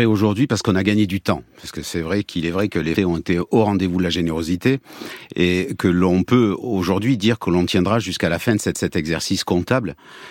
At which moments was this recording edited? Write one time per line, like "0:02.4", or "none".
0:03.0
0:08.7